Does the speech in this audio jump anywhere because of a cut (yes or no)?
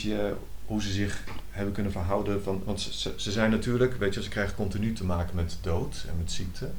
no